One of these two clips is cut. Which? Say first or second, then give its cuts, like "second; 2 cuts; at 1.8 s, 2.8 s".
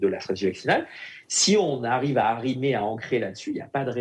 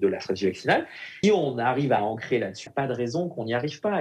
second; 3 cuts; at 1.2 s, 2.0 s, 2.7 s